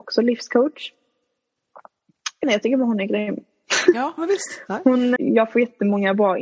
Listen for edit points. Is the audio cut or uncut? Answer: cut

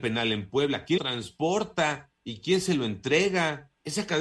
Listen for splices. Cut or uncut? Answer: cut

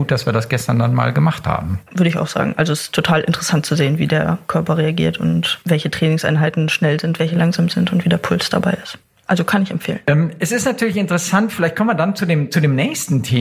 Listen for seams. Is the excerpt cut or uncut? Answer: uncut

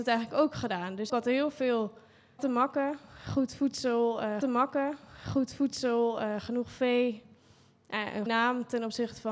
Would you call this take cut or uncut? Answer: cut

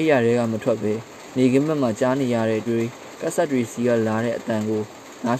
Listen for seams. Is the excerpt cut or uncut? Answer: cut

